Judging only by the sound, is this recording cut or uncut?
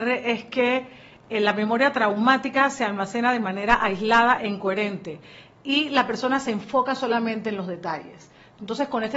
cut